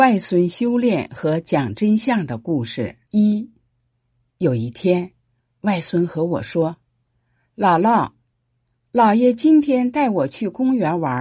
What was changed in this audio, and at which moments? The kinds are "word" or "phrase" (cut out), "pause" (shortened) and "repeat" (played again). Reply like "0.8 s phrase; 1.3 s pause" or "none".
3.0 s pause